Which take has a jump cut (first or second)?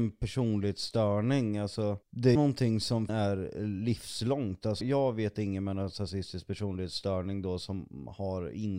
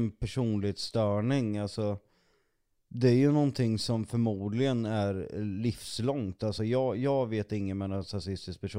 first